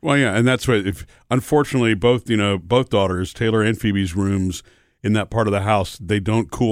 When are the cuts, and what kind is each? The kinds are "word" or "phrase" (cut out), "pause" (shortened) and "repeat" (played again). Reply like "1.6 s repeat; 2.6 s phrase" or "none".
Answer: none